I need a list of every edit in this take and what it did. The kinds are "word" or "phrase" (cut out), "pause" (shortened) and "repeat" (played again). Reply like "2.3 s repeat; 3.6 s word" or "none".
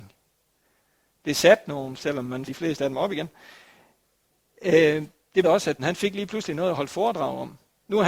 2.0 s word; 2.5 s word; 5.4 s word; 5.8 s word